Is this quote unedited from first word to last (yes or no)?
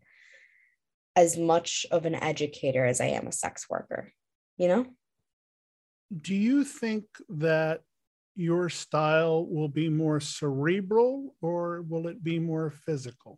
yes